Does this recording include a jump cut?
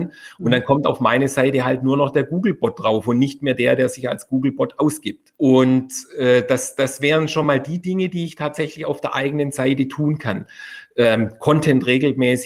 no; 0 cuts

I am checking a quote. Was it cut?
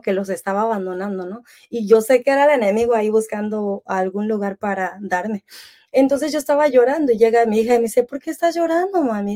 no; 0 cuts

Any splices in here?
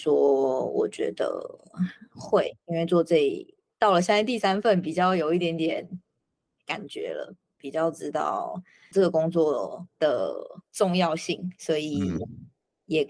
yes; 1 cut; at 8.9 s

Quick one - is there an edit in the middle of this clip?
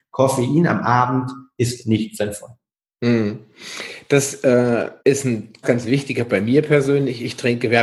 yes; 3 cuts; at 5.0 s, 5.6 s, 6.3 s

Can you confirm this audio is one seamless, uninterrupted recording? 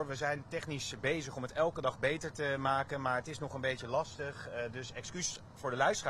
yes; 0 cuts

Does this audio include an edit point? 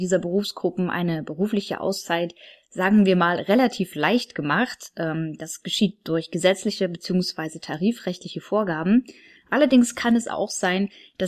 no; 0 cuts

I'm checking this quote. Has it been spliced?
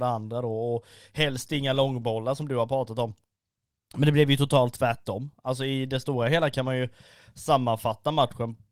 no; 0 cuts

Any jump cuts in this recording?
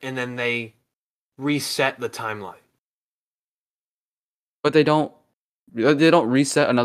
no; 0 cuts

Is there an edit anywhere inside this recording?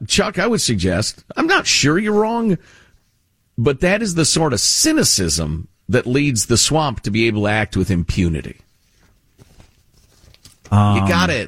no; 0 cuts

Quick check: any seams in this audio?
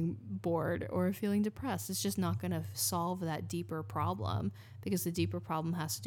no; 0 cuts

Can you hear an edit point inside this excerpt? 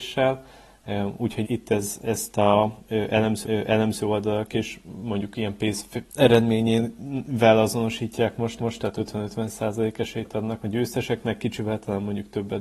yes; 5 cuts; at 1.4 s, 3.4 s, 6.1 s, 8.6 s, 10.6 s

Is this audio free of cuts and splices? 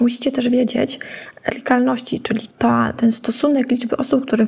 no; 2 cuts; at 1.5 s, 2.5 s

